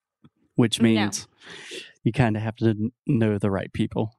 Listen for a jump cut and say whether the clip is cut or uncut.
uncut